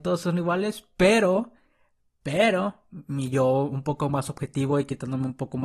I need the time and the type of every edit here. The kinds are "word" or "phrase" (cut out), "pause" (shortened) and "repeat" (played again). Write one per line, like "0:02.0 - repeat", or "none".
none